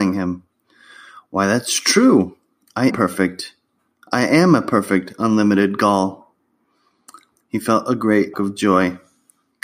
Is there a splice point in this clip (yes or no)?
yes